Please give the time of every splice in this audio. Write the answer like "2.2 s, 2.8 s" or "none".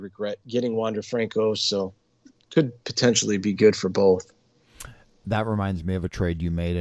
none